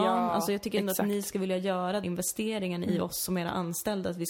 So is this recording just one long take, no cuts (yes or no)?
no